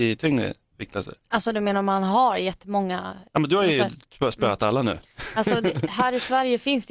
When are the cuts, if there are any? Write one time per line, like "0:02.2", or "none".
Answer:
0:01.2
0:03.3